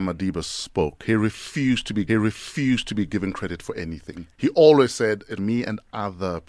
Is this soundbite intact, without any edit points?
no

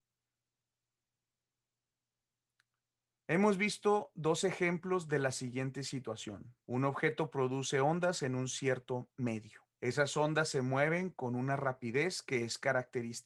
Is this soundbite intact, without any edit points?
no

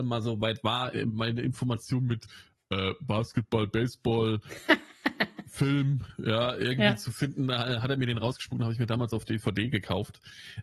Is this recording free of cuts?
yes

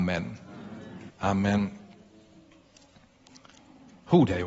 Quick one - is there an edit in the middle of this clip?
yes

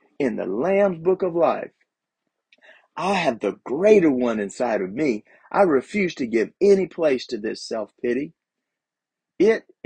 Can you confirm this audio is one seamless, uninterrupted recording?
yes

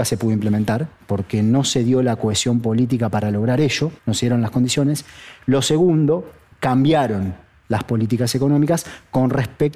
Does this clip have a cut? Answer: yes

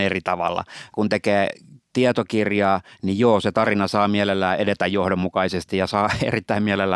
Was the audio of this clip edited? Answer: no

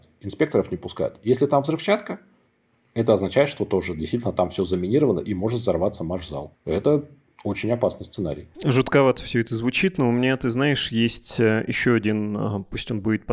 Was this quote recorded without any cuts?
no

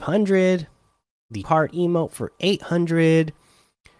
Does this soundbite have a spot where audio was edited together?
yes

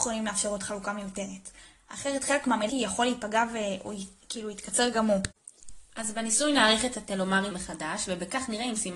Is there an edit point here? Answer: yes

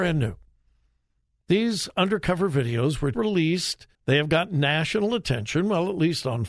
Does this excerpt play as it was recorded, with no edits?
no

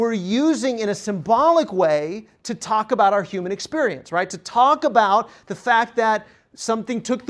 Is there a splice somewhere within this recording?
no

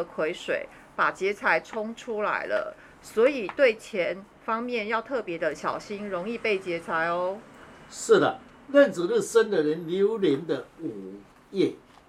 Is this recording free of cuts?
yes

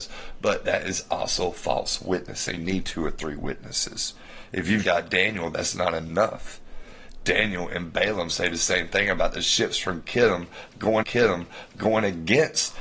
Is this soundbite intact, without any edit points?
no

